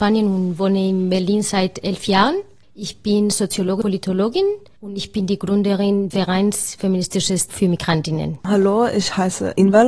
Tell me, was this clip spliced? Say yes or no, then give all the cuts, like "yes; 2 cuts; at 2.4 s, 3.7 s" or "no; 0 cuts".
yes; 3 cuts; at 3.8 s, 6.1 s, 7.5 s